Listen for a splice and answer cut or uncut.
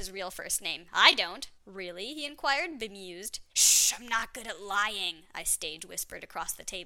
cut